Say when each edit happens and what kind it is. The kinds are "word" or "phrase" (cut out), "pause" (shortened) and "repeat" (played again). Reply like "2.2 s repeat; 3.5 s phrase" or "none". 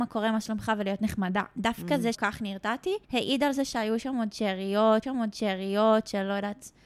2.1 s word; 3.0 s pause; 5.0 s repeat